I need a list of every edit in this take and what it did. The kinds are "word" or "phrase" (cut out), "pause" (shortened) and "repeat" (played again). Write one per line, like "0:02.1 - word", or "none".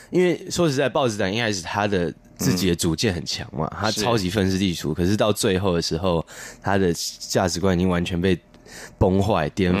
none